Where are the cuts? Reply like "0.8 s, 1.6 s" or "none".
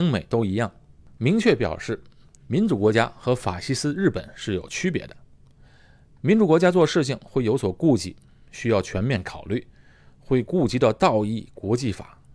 none